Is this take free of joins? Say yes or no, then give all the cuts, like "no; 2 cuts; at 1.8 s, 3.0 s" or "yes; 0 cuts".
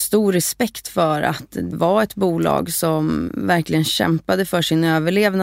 no; 2 cuts; at 1.7 s, 3.3 s